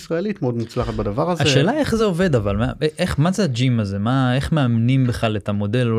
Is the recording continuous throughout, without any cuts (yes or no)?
yes